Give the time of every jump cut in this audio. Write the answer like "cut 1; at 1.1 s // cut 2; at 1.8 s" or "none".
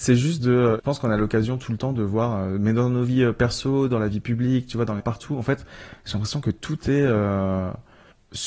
cut 1; at 5.0 s